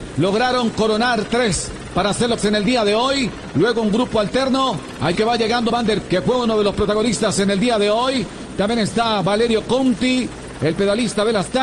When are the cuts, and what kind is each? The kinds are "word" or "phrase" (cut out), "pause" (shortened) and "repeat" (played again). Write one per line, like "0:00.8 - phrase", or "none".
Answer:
0:02.4 - word
0:05.1 - word
0:05.7 - word
0:06.0 - word